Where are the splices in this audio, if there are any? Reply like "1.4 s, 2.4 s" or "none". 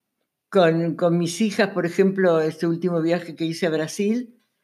none